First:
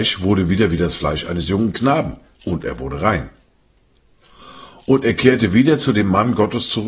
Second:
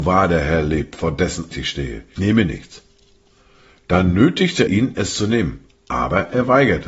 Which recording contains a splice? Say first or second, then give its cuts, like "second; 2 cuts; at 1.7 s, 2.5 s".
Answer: second; 3 cuts; at 1.5 s, 2.2 s, 4.7 s